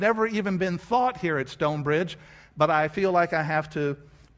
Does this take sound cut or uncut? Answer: uncut